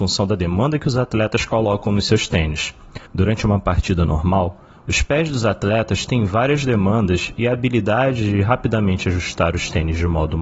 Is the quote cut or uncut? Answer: cut